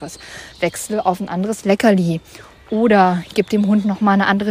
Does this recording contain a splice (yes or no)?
no